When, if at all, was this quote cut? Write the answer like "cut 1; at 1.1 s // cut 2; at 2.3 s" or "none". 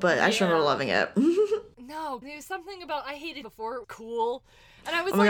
cut 1; at 2.2 s // cut 2; at 3.4 s // cut 3; at 3.8 s